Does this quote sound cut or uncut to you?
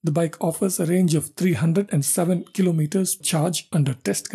cut